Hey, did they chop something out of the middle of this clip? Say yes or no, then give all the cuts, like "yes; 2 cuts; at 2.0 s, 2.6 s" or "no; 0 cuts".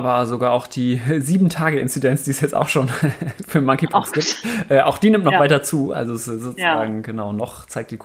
no; 0 cuts